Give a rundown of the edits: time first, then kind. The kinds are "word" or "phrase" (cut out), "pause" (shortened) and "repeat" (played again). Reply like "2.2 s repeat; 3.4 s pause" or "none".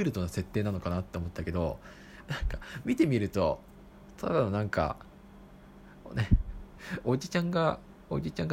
none